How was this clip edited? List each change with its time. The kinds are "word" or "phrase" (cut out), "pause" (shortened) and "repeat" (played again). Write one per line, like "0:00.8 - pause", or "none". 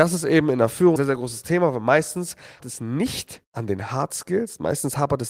0:01.0 - word
0:02.6 - word
0:03.5 - pause